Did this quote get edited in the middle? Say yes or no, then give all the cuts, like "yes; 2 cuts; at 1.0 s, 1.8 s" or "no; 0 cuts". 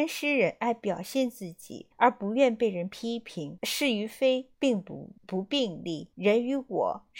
yes; 5 cuts; at 1.9 s, 3.6 s, 4.5 s, 5.2 s, 6.1 s